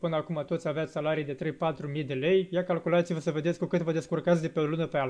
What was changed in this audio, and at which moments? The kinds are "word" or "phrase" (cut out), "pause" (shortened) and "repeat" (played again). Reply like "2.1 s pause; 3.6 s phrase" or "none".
none

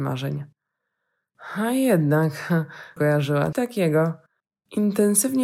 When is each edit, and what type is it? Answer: 3.0 s word; 3.5 s word; 4.4 s pause

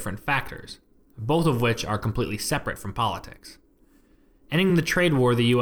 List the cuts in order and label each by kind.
none

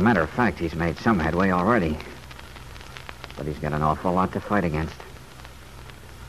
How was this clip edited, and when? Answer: none

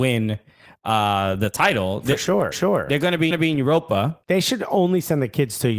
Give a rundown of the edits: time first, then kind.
2.5 s repeat; 3.3 s repeat; 4.2 s pause

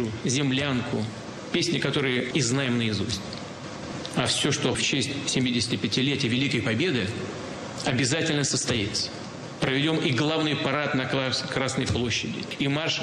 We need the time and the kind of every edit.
2.3 s word; 4.7 s word

